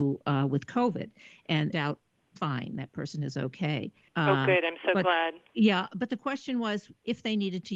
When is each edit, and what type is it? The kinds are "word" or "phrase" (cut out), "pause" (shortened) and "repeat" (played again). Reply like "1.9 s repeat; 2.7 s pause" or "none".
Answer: 1.7 s phrase; 4.1 s pause